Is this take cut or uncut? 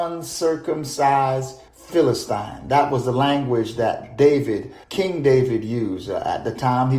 cut